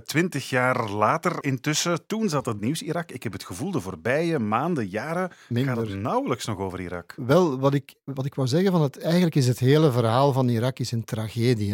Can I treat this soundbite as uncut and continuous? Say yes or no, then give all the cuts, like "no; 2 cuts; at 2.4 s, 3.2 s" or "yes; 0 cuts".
no; 2 cuts; at 1.4 s, 2.6 s